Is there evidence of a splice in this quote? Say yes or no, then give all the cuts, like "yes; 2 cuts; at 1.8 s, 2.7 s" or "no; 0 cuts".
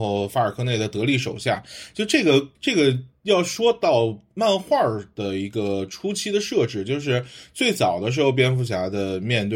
yes; 1 cut; at 2.5 s